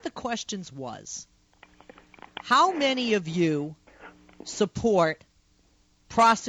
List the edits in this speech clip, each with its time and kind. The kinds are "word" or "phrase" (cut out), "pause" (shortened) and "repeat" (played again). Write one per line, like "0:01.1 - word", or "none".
none